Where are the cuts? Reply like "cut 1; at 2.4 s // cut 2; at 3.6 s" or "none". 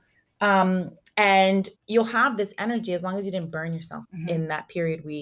cut 1; at 1.8 s // cut 2; at 4.0 s